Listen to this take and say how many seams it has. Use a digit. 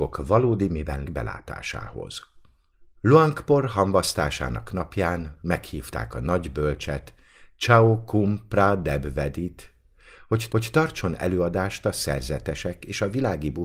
3